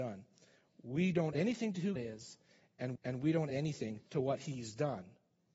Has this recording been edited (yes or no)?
yes